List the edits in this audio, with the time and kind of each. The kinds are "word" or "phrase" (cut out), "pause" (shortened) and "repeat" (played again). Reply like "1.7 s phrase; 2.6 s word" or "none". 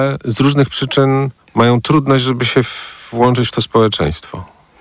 1.4 s pause